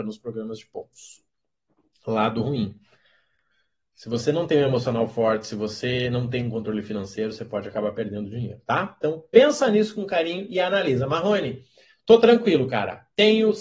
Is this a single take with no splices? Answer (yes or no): yes